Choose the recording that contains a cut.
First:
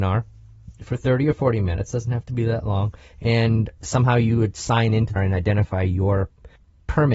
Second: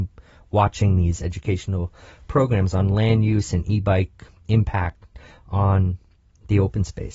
first; 1 cut; at 5.2 s

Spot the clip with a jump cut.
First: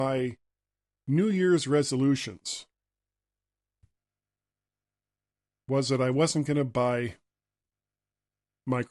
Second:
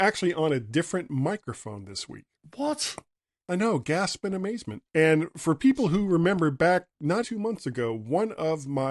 second; 3 cuts; at 2.4 s, 4.9 s, 7.2 s

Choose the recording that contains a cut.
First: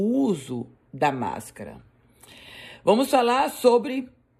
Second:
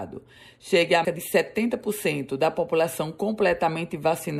second; 1 cut; at 1.0 s

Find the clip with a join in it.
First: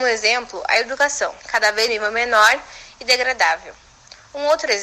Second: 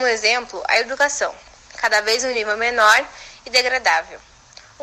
first; 2 cuts; at 1.4 s, 1.9 s

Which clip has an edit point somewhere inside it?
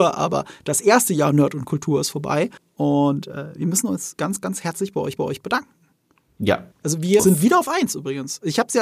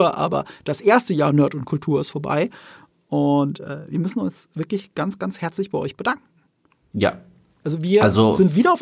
first; 5 cuts; at 2.6 s, 4.2 s, 5.2 s, 6.7 s, 7.2 s

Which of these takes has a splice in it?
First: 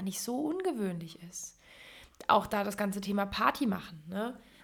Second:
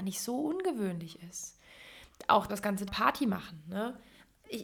second; 2 cuts; at 2.5 s, 2.9 s

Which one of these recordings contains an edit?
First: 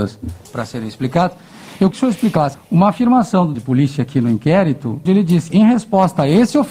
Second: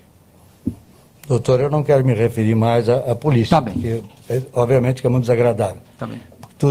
first; 5 cuts; at 1.9 s, 2.5 s, 3.5 s, 5.1 s, 5.5 s

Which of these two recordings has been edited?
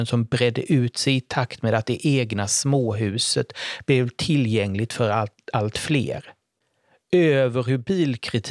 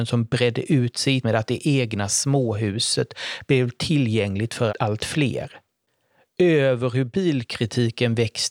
second; 2 cuts; at 1.2 s, 4.7 s

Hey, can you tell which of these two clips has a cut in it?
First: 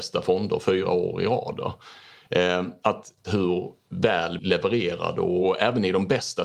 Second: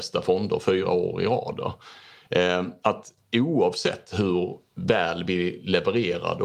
first; 2 cuts; at 3.2 s, 4.4 s

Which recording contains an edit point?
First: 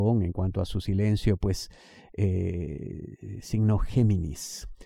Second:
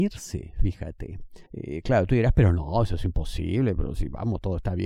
second; 1 cut; at 1.5 s

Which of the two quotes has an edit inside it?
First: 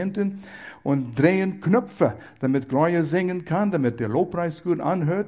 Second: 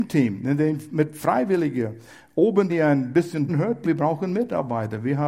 second; 3 cuts; at 2.7 s, 3.5 s, 3.8 s

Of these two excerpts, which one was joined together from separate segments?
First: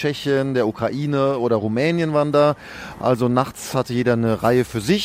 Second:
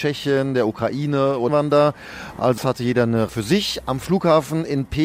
second; 3 cuts; at 1.5 s, 2.6 s, 3.3 s

